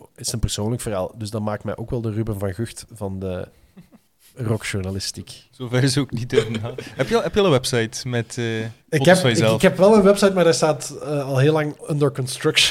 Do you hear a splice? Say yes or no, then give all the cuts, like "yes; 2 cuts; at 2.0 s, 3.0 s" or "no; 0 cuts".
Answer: yes; 2 cuts; at 4.1 s, 8.8 s